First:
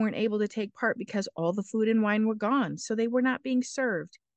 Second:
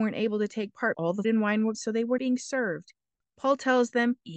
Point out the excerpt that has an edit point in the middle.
second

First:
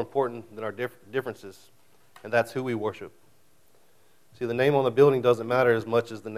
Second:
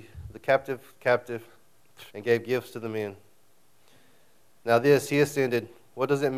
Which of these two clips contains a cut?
second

